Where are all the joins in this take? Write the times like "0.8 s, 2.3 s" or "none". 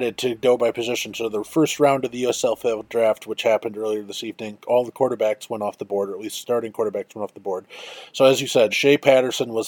8.7 s

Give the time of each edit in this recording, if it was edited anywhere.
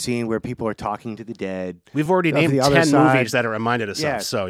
none

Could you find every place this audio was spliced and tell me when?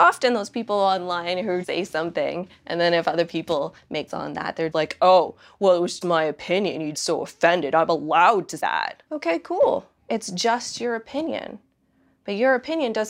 1.6 s, 4.1 s, 4.7 s, 6.0 s, 6.9 s, 8.6 s, 9.1 s, 10.0 s

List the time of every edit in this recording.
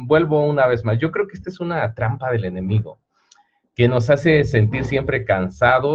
none

